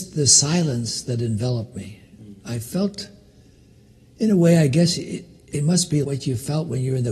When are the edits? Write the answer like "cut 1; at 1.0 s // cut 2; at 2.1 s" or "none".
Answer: cut 1; at 6.0 s